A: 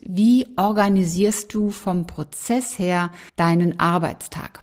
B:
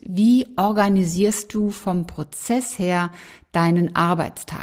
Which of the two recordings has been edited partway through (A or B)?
A